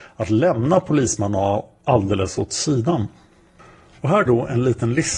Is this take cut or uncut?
cut